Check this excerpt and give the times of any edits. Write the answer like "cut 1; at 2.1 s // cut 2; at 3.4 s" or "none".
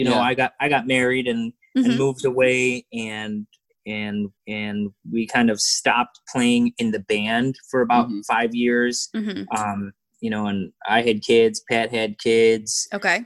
cut 1; at 4.4 s